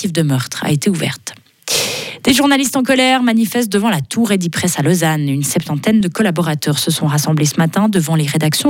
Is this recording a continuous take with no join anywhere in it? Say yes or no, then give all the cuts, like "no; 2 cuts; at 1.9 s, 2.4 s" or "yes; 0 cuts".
yes; 0 cuts